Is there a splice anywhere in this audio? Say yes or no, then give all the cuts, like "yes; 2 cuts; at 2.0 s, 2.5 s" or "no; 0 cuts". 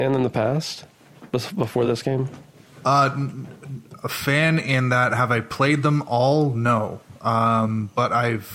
no; 0 cuts